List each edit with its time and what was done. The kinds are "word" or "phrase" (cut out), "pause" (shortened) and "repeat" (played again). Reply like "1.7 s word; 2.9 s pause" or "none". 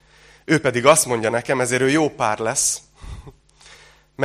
none